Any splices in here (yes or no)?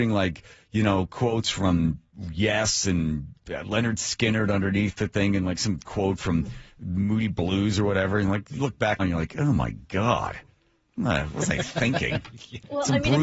yes